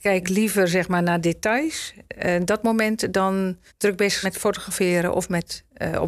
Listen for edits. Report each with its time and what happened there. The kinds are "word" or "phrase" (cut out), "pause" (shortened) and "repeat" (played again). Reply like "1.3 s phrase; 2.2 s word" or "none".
3.7 s pause; 4.2 s word